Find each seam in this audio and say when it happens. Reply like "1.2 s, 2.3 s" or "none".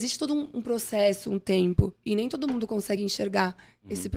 none